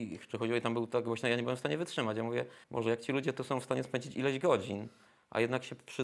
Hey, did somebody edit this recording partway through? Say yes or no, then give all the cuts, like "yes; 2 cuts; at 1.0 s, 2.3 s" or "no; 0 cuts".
yes; 1 cut; at 2.6 s